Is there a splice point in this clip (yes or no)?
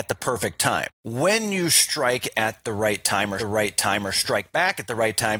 yes